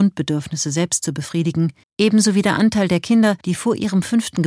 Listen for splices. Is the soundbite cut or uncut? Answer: cut